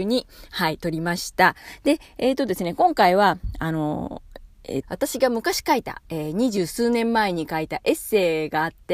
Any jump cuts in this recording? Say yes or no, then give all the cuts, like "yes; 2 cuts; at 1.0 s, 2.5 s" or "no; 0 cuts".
yes; 1 cut; at 4.8 s